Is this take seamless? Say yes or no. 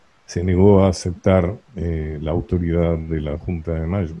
no